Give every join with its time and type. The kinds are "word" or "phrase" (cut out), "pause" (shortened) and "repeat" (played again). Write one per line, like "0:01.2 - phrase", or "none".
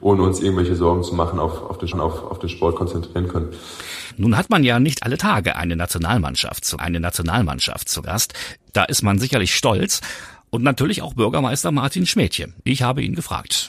0:01.9 - repeat
0:06.8 - repeat